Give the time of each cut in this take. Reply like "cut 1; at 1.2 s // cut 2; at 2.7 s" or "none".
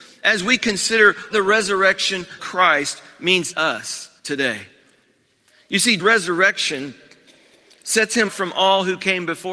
cut 1; at 1.3 s // cut 2; at 2.4 s // cut 3; at 3.5 s // cut 4; at 4.2 s // cut 5; at 6.0 s // cut 6; at 8.3 s